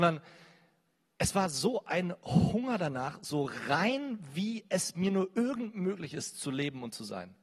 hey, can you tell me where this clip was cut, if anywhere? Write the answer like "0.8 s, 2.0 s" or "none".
none